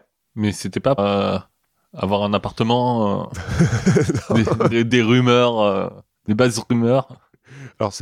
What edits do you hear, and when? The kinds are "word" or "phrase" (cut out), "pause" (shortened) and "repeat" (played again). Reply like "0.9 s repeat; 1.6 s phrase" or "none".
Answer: 1.0 s word; 4.7 s word